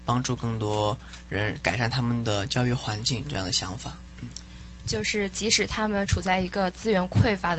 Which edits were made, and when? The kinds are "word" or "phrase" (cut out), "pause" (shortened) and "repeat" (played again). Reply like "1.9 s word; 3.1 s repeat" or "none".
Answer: 4.8 s word